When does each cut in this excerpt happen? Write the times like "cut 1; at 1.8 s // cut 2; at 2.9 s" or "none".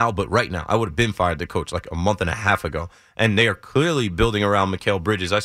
none